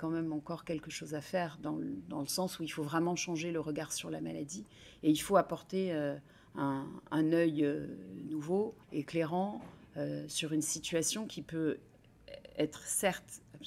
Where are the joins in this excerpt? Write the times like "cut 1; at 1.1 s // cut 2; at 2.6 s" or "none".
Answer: cut 1; at 8.8 s